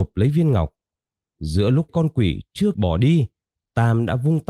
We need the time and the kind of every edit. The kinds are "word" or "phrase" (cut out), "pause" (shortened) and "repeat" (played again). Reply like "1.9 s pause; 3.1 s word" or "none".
1.9 s word; 2.7 s word